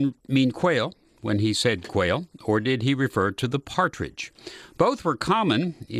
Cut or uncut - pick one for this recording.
uncut